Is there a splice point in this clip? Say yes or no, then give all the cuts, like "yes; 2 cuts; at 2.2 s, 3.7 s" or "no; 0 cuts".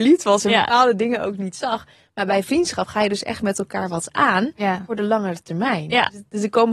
no; 0 cuts